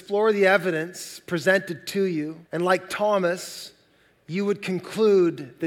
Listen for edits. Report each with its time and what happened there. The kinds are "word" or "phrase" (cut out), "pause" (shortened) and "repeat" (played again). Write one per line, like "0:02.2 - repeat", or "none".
0:02.4 - pause